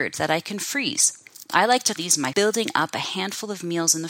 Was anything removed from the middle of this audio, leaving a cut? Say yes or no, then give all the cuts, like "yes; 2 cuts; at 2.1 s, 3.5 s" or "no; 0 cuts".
yes; 2 cuts; at 2.0 s, 2.3 s